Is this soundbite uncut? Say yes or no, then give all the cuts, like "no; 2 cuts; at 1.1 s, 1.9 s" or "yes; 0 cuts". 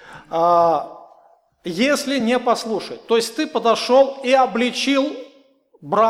yes; 0 cuts